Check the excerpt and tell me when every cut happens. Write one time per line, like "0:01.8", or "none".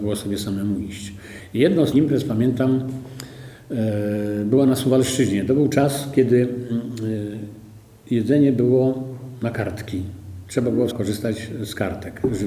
0:01.9
0:10.9